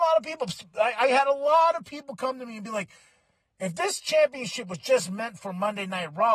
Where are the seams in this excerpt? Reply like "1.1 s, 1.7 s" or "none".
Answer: none